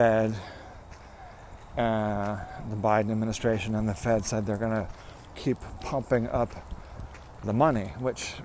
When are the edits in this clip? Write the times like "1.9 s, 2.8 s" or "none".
5.3 s, 7.4 s